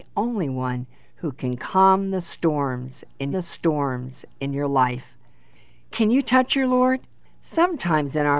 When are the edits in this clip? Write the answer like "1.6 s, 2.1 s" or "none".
3.3 s